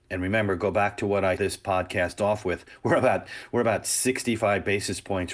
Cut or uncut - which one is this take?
cut